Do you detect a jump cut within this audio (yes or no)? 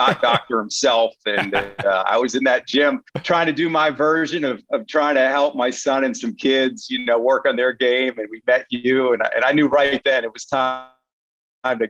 yes